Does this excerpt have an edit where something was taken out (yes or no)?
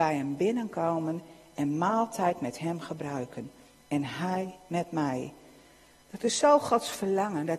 no